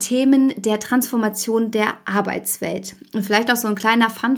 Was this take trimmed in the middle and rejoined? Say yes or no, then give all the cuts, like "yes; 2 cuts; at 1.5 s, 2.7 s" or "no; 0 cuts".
no; 0 cuts